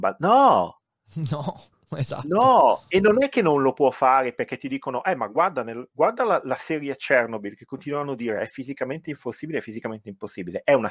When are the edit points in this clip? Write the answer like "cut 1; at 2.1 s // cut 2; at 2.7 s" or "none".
none